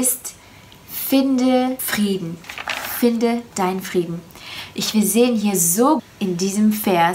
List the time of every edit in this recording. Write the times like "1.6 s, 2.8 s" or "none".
1.8 s, 4.9 s, 6.0 s